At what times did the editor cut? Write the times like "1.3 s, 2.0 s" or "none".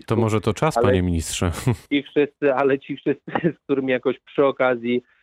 1.9 s